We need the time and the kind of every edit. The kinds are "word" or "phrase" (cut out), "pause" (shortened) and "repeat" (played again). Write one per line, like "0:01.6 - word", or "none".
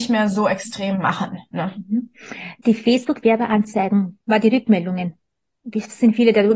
0:04.2 - word